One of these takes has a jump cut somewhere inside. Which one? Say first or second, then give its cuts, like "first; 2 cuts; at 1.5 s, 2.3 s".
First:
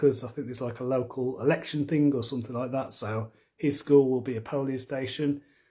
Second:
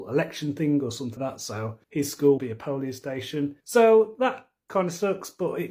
second; 4 cuts; at 1.2 s, 1.8 s, 2.4 s, 3.6 s